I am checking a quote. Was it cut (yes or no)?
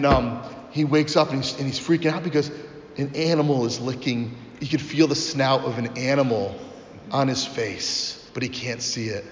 yes